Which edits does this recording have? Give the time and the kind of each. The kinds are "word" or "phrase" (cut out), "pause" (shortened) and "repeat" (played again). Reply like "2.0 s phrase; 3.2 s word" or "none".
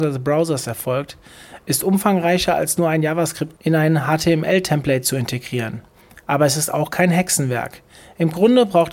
none